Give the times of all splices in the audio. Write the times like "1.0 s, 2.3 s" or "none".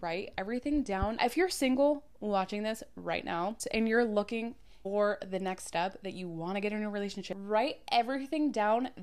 none